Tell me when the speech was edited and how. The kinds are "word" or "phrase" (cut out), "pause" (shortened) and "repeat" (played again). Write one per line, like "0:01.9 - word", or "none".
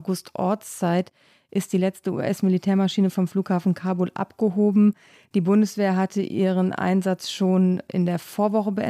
none